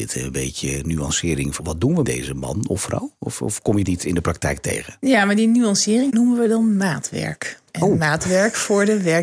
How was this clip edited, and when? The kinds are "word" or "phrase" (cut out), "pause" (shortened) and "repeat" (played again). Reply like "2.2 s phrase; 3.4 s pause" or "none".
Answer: 1.6 s word; 2.0 s word; 3.8 s word; 6.1 s word; 7.7 s pause